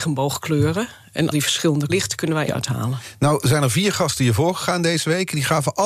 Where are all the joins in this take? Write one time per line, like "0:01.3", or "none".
0:01.3
0:01.9
0:02.5